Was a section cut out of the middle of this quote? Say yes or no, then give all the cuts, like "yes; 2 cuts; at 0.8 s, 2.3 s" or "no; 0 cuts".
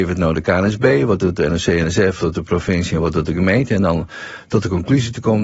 yes; 1 cut; at 2.2 s